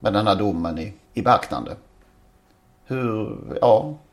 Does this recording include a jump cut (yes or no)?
no